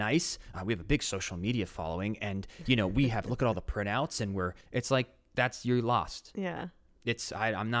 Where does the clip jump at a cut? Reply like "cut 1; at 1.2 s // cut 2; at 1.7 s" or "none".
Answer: cut 1; at 4.6 s